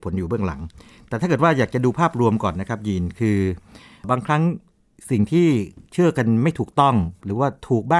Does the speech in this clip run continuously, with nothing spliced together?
yes; 0 cuts

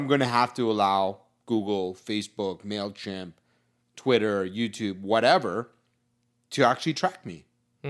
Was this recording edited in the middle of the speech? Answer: no; 0 cuts

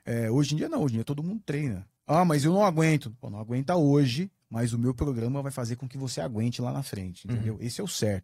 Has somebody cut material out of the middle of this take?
yes; 1 cut; at 2.0 s

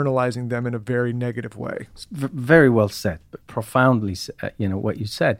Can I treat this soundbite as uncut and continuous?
no; 1 cut; at 3.4 s

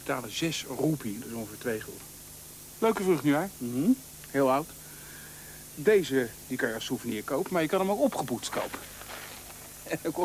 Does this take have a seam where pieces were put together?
no; 0 cuts

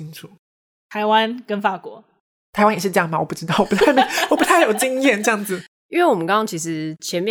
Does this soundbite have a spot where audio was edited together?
no; 0 cuts

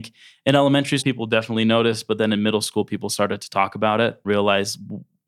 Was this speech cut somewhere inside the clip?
yes; 2 cuts; at 1.0 s, 4.2 s

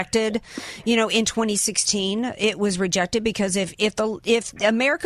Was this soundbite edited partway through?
no; 0 cuts

